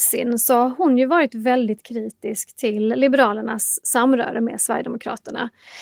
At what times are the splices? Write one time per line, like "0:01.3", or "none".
none